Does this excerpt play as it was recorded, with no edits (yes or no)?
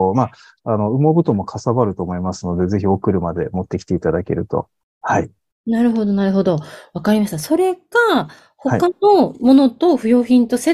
yes